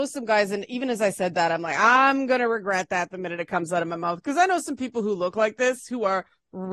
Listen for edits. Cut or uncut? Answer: uncut